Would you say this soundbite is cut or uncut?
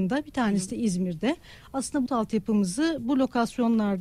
cut